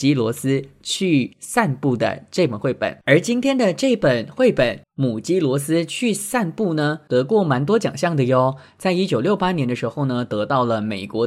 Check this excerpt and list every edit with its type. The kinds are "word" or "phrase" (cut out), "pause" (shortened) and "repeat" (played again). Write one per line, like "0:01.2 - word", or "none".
0:03.0 - pause
0:04.8 - pause